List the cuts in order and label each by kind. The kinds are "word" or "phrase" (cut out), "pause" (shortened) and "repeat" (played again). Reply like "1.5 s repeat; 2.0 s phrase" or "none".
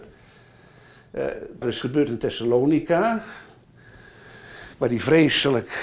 1.6 s word; 4.7 s pause